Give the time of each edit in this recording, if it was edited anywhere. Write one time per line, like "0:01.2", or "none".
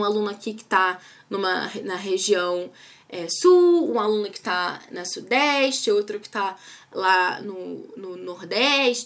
none